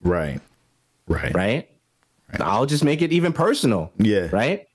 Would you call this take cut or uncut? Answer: uncut